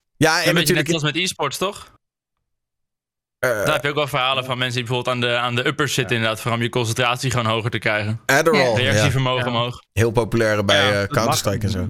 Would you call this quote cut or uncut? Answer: cut